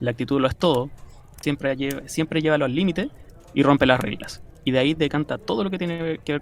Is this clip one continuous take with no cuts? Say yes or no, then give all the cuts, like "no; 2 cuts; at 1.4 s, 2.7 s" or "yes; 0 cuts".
yes; 0 cuts